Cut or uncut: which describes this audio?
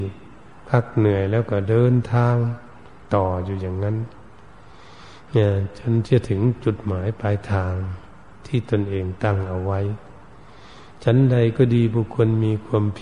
uncut